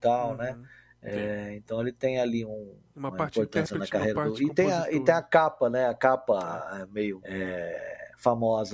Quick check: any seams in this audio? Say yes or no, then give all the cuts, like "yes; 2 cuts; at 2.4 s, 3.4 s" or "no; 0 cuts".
no; 0 cuts